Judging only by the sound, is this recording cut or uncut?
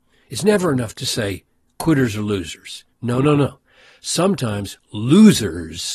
uncut